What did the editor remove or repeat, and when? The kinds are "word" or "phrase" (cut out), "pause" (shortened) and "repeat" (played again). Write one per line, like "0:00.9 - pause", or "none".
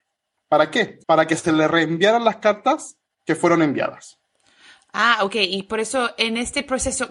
0:01.0 - pause